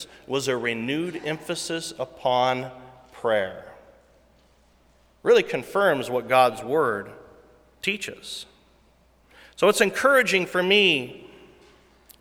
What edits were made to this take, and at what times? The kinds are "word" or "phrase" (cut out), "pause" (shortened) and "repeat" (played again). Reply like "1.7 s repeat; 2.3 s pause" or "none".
none